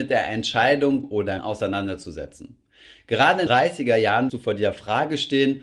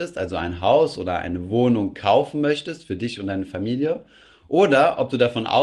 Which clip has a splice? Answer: first; 4 cuts; at 1.0 s, 1.4 s, 3.5 s, 4.3 s

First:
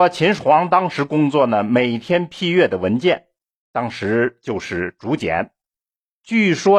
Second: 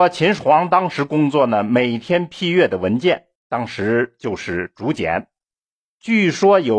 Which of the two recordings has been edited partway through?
second; 1 cut; at 3.4 s

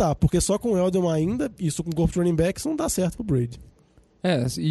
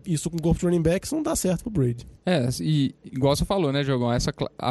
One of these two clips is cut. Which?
second; 1 cut; at 2.2 s

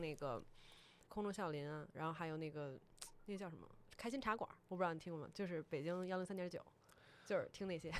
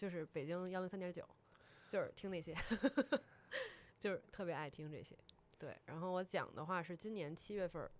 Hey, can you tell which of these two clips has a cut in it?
first; 1 cut; at 1.1 s

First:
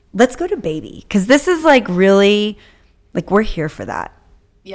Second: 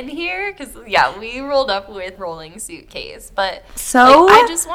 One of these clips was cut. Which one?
second; 1 cut; at 2.2 s

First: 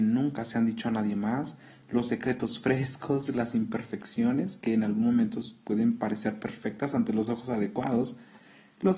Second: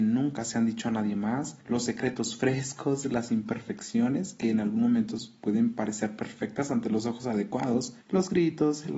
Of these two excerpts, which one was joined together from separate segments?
second; 2 cuts; at 1.6 s, 8.0 s

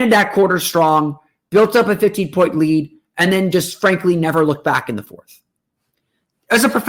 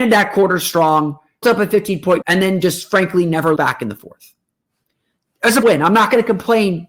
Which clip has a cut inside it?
second; 4 cuts; at 1.4 s, 2.2 s, 3.6 s, 5.6 s

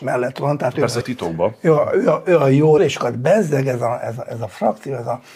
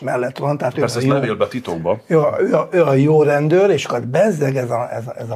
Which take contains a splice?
first; 2 cuts; at 1.0 s, 2.8 s

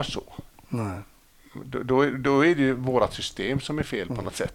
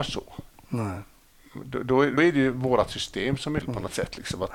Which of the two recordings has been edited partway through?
second; 2 cuts; at 2.2 s, 3.6 s

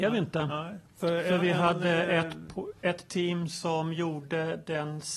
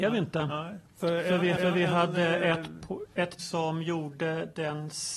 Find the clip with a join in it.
second; 2 cuts; at 1.6 s, 3.4 s

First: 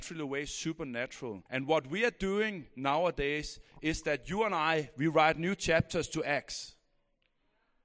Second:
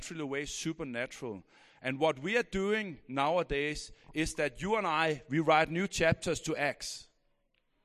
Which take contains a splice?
first; 1 cut; at 1.5 s

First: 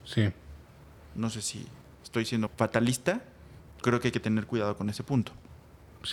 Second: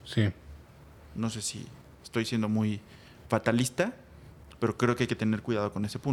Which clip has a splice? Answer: first; 2 cuts; at 2.5 s, 3.8 s

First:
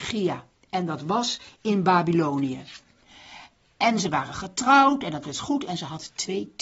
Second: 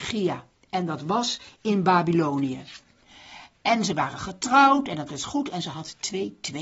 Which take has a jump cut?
second; 1 cut; at 3.5 s

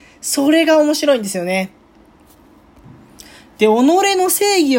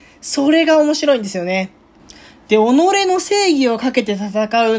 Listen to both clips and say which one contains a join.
second; 1 cut; at 2.0 s

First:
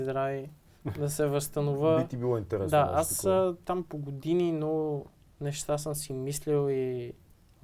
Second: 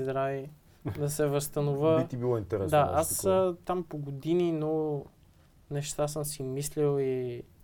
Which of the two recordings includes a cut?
first; 1 cut; at 5.2 s

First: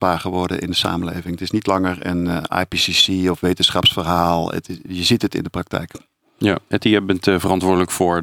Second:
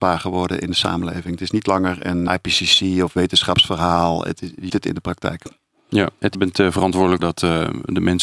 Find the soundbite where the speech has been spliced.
second; 4 cuts; at 2.3 s, 4.7 s, 6.3 s, 7.2 s

